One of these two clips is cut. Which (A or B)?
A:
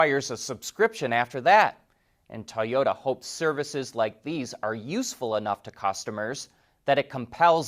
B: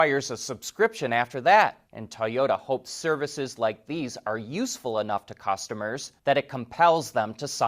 B